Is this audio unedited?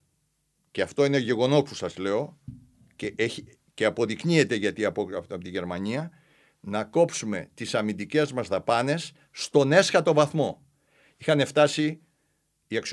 yes; 0 cuts

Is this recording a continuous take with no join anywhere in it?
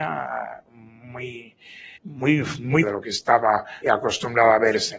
no; 3 cuts; at 2.0 s, 2.8 s, 3.8 s

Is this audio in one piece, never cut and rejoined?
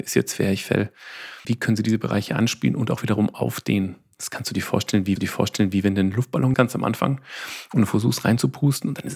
no; 3 cuts; at 1.4 s, 5.2 s, 6.5 s

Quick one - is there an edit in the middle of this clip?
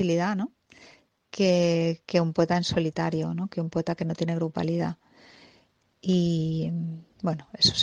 no; 0 cuts

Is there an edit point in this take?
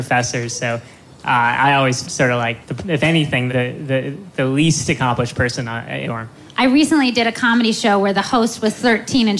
yes; 4 cuts; at 2.0 s, 2.6 s, 3.5 s, 6.0 s

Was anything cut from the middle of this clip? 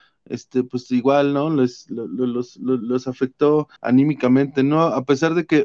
yes; 1 cut; at 3.8 s

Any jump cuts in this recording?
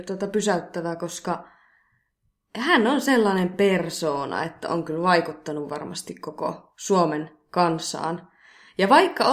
no; 0 cuts

